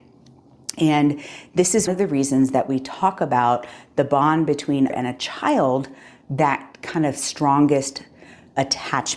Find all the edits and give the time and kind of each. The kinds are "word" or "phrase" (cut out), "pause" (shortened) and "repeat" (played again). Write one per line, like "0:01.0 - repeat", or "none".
0:01.9 - word
0:04.9 - word
0:06.4 - word